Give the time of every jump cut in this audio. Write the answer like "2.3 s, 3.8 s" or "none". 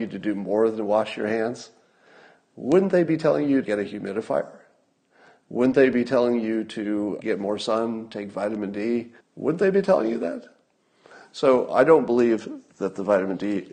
3.6 s, 7.2 s, 9.2 s